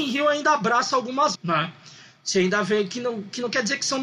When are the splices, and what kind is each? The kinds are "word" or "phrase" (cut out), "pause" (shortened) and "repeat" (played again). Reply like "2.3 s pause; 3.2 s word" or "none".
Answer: 1.3 s word